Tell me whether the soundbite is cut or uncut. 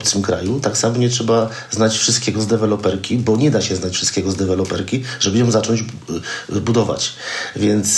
uncut